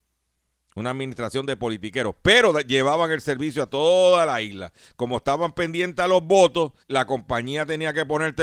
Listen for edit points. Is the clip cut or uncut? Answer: cut